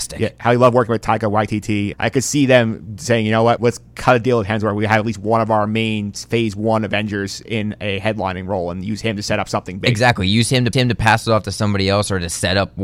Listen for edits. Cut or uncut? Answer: cut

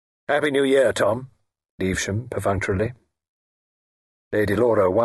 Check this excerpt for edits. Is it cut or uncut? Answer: cut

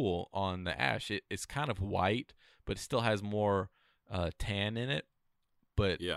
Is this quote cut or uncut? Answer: uncut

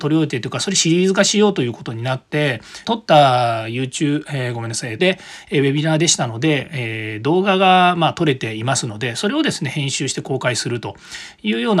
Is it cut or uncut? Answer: cut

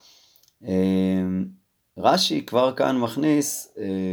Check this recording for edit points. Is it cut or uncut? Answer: uncut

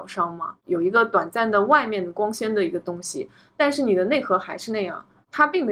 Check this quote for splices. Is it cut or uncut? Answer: uncut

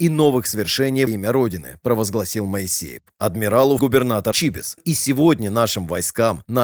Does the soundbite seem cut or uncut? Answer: cut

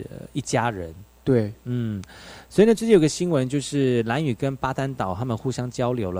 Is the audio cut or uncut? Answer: uncut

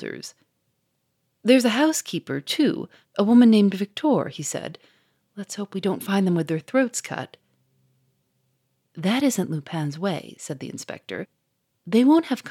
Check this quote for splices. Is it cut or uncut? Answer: uncut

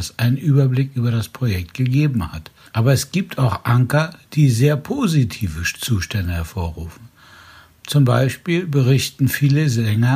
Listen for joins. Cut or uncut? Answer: cut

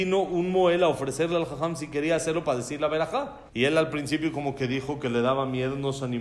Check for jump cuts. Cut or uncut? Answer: cut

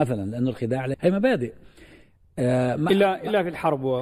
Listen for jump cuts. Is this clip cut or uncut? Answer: cut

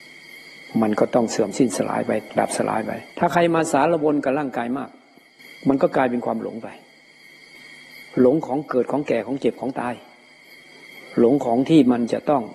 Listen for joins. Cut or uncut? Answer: cut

